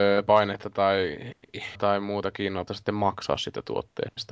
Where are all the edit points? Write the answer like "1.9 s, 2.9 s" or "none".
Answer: 1.7 s, 2.7 s

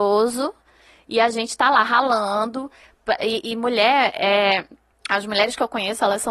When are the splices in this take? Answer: 4.9 s

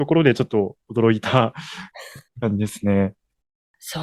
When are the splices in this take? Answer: 2.3 s

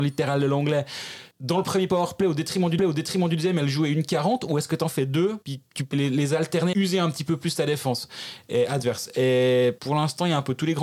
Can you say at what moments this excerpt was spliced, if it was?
1.3 s, 2.8 s, 5.4 s, 5.9 s, 6.7 s, 9.8 s

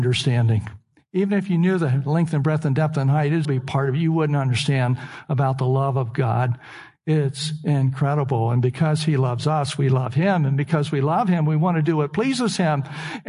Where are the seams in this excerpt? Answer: 3.4 s

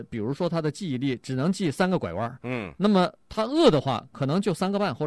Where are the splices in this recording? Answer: none

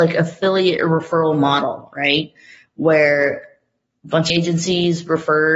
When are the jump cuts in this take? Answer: 4.3 s

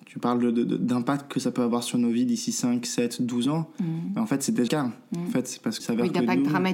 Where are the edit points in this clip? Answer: 4.7 s, 5.8 s

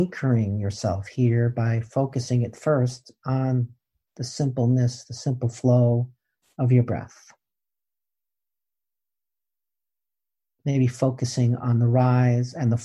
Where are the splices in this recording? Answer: none

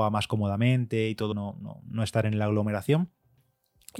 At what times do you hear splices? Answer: 1.3 s

